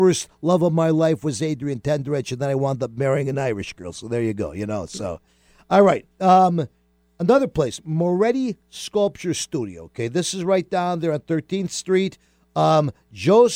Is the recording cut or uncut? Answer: uncut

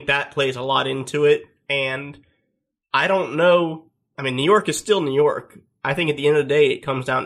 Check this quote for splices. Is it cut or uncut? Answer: uncut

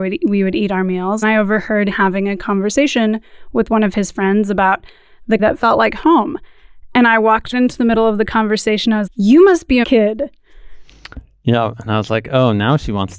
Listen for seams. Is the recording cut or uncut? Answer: cut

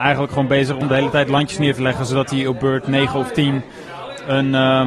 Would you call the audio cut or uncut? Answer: uncut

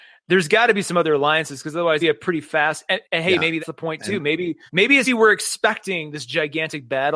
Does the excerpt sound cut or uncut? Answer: cut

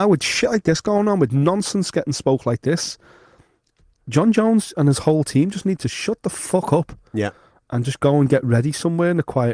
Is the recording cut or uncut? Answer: uncut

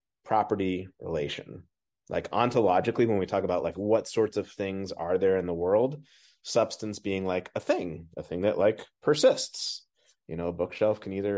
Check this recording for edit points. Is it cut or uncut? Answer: cut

